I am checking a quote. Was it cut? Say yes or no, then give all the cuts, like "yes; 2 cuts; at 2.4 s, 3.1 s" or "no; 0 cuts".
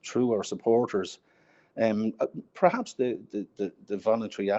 no; 0 cuts